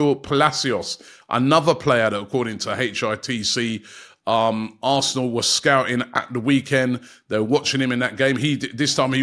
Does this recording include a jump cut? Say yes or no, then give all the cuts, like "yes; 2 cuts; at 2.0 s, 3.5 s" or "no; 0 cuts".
no; 0 cuts